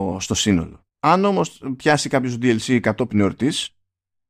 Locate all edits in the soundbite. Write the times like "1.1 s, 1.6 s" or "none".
0.9 s